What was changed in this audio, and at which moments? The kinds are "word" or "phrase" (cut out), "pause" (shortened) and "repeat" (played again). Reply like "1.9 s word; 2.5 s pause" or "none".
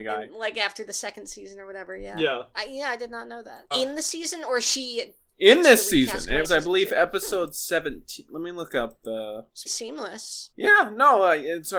2.5 s word; 3.7 s word; 6.4 s word; 9.7 s word